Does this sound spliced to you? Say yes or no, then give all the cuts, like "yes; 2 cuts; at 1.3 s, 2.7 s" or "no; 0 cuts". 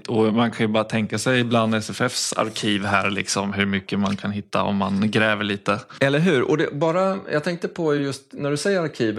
no; 0 cuts